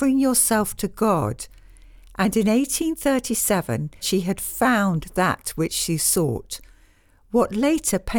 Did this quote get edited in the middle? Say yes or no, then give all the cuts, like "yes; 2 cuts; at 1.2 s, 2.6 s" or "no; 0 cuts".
yes; 1 cut; at 4.0 s